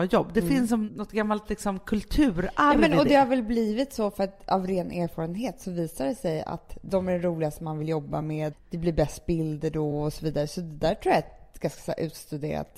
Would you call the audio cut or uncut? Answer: uncut